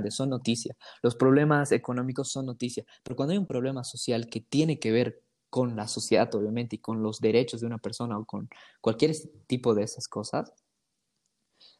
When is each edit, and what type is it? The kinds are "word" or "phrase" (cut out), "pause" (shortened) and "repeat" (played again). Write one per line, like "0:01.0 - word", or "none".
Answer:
none